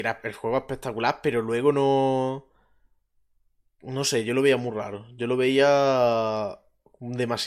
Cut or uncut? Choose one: uncut